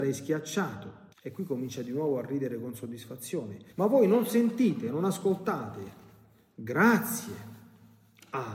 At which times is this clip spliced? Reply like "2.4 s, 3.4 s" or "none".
1.1 s, 3.7 s